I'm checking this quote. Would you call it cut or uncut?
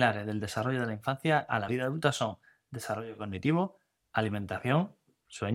uncut